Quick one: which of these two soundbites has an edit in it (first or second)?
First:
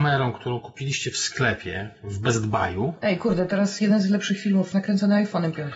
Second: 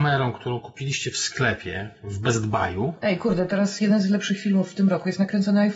first